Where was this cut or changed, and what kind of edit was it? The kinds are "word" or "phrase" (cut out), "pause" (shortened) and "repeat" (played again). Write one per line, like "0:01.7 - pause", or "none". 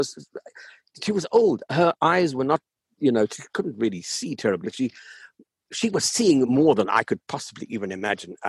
0:04.6 - word